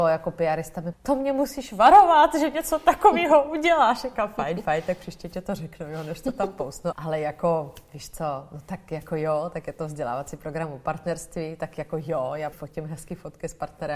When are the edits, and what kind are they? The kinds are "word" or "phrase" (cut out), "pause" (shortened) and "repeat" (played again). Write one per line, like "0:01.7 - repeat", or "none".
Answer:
0:00.9 - word
0:06.9 - word
0:12.5 - word